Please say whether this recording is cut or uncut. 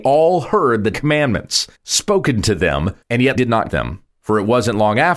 cut